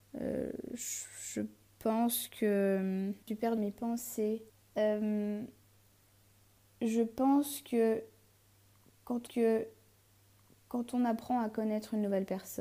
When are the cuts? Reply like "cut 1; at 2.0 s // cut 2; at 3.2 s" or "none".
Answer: cut 1; at 3.2 s // cut 2; at 3.6 s // cut 3; at 4.5 s // cut 4; at 9.3 s